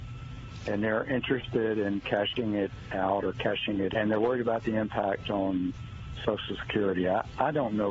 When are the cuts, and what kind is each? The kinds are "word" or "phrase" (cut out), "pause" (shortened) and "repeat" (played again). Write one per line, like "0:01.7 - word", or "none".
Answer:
0:03.9 - word